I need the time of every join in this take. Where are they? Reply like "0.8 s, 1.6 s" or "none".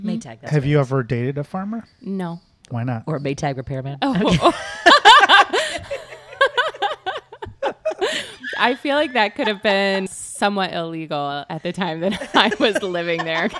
1.9 s, 10.1 s